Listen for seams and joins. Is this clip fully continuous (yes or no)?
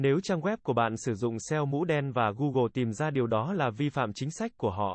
yes